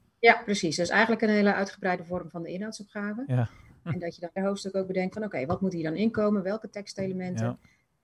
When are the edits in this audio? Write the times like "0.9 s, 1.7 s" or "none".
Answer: 4.4 s